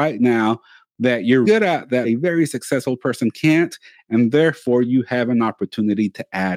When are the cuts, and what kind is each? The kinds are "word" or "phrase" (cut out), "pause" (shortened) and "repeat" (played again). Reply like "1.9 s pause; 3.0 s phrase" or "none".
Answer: 1.4 s word; 2.0 s word